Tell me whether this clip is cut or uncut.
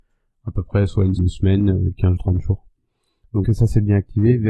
cut